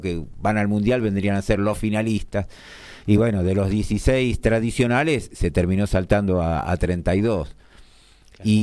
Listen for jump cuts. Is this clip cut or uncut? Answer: uncut